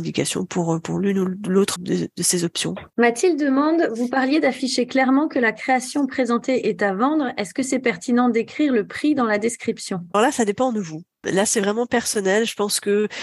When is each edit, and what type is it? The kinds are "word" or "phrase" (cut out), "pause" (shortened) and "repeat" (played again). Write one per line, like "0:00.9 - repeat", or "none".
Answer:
0:01.8 - word
0:02.9 - pause
0:10.1 - word